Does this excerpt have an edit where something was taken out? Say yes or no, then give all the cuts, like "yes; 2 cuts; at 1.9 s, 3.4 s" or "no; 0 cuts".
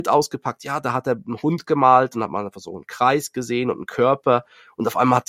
no; 0 cuts